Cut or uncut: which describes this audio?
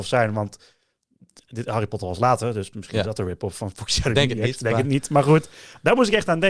uncut